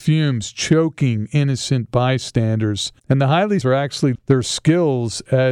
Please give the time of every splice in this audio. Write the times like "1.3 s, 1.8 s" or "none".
3.0 s, 3.6 s, 4.1 s